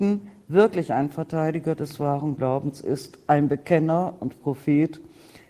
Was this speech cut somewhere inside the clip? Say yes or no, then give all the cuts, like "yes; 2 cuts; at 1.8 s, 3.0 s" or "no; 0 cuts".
no; 0 cuts